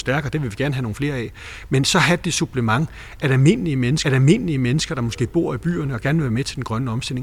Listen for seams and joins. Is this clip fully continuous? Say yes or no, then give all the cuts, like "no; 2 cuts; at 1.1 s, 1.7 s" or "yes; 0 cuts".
no; 1 cut; at 4.0 s